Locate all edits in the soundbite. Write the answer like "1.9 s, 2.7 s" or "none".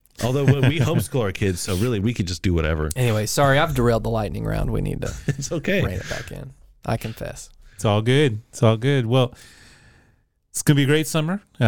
none